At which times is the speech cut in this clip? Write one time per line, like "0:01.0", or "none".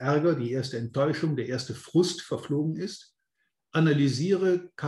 none